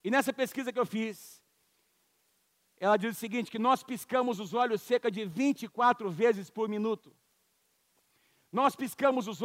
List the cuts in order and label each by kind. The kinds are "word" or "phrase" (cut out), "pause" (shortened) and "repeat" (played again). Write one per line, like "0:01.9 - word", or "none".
none